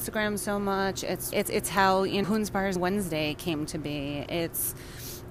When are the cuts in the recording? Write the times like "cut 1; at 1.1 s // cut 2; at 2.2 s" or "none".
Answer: cut 1; at 1.3 s // cut 2; at 2.2 s // cut 3; at 2.8 s